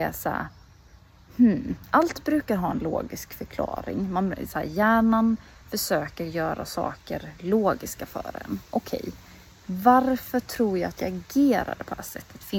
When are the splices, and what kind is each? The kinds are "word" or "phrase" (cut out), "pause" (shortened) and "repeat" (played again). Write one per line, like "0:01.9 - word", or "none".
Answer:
none